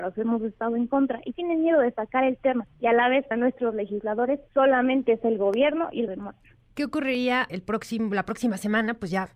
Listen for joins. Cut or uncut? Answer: cut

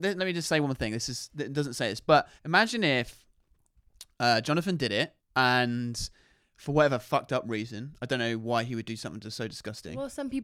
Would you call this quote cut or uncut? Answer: cut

